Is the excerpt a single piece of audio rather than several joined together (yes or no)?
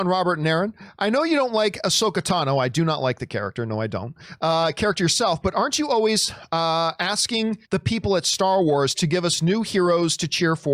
no